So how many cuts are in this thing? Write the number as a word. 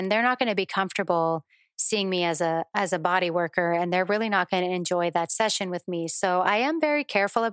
zero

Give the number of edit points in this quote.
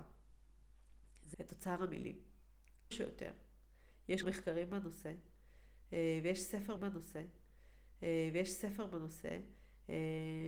four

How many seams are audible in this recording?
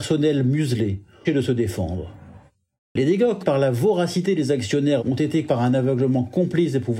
four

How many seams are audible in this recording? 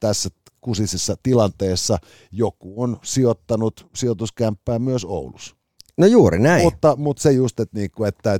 zero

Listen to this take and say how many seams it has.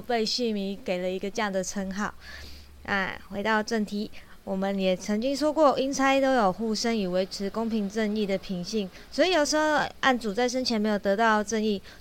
zero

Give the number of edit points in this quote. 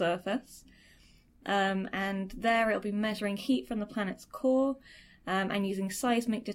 zero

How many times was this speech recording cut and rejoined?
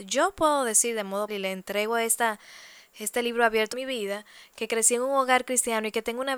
two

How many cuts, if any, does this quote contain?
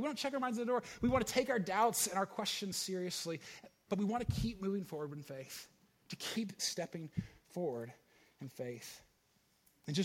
zero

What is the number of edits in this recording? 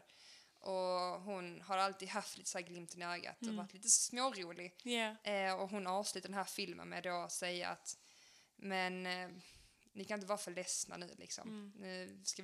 zero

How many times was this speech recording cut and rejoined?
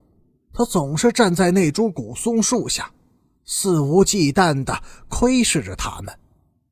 zero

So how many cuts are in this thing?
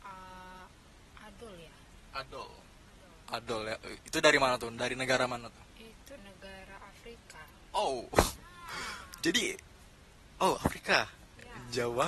one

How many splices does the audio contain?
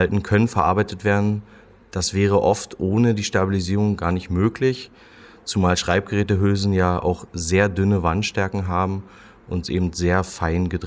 zero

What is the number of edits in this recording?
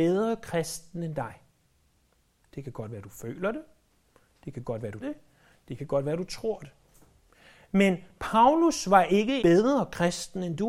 two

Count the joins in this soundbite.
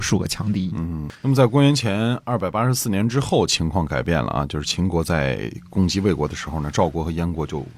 one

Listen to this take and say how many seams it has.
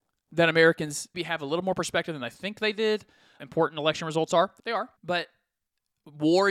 four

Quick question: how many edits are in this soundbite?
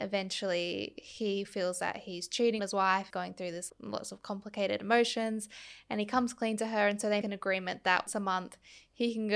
five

